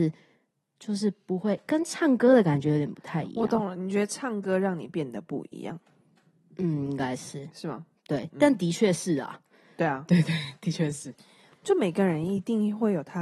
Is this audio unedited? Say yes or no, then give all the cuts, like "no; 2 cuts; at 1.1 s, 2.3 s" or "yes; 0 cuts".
yes; 0 cuts